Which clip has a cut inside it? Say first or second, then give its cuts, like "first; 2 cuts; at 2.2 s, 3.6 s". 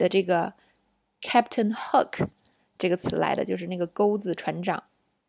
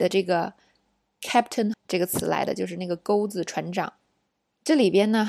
second; 1 cut; at 1.7 s